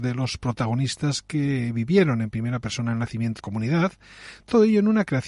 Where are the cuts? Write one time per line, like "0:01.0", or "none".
0:03.4